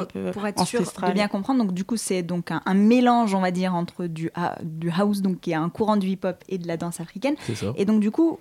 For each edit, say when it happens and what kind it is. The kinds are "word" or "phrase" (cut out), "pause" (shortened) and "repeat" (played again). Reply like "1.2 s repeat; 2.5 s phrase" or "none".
none